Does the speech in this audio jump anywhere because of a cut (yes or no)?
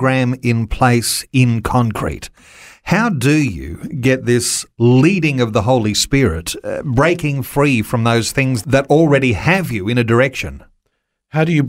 no